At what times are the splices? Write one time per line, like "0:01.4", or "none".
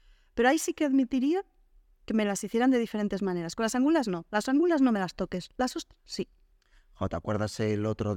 none